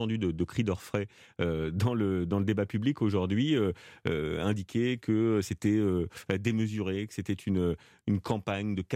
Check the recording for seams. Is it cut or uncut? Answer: uncut